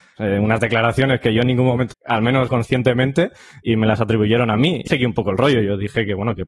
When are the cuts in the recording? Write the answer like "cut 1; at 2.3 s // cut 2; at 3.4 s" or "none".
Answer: cut 1; at 1.9 s // cut 2; at 2.5 s // cut 3; at 4.9 s